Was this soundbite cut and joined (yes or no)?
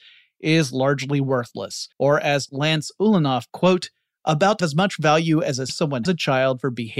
yes